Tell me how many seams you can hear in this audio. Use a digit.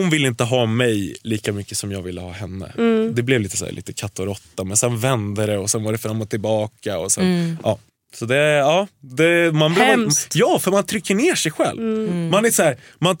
1